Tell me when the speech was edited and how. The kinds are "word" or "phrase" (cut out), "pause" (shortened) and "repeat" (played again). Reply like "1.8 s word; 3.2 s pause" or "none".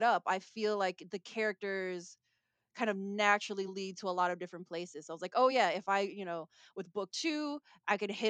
none